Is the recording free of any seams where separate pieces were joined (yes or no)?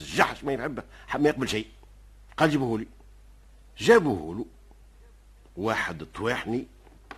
no